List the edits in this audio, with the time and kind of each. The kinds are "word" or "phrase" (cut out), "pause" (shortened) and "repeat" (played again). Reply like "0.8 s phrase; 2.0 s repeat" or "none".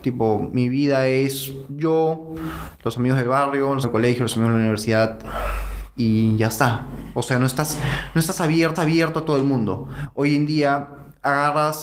3.8 s word; 8.8 s repeat